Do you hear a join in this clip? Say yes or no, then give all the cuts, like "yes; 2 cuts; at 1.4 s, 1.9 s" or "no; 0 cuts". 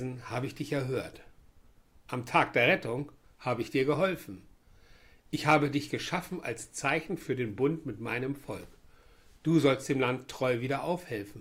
no; 0 cuts